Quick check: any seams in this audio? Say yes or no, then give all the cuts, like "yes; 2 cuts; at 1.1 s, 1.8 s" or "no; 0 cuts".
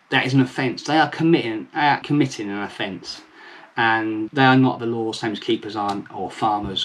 yes; 3 cuts; at 2.0 s, 4.3 s, 4.8 s